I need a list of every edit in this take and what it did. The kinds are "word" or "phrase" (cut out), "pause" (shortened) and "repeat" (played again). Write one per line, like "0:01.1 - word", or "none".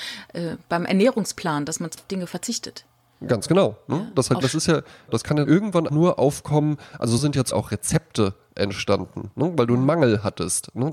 0:02.0 - word
0:04.4 - word
0:05.1 - word
0:05.5 - word
0:05.9 - word
0:07.2 - word
0:07.5 - word